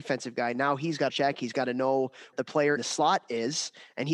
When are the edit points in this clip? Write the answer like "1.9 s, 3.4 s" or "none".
1.1 s, 2.3 s, 2.8 s